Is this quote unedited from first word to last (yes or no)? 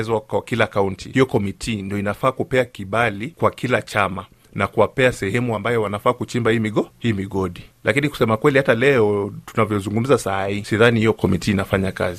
yes